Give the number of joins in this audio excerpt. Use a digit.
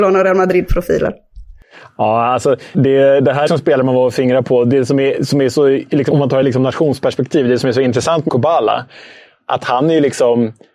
5